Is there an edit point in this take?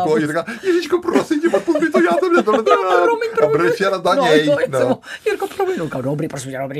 no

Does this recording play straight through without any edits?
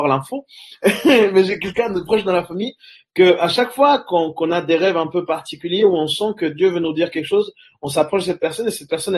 yes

